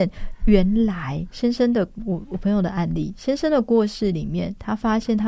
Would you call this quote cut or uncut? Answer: cut